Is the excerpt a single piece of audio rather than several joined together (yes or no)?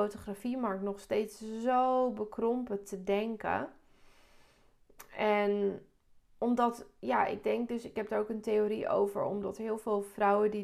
yes